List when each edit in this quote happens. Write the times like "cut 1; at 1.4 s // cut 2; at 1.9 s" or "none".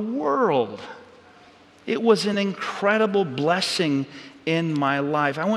none